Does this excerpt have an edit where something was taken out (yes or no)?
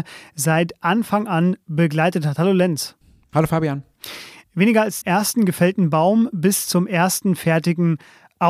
yes